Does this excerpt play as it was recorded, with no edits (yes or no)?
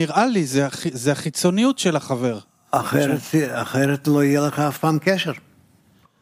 yes